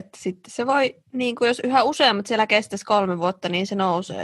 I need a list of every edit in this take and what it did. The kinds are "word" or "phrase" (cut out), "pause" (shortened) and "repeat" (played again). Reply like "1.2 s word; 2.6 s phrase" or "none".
1.0 s pause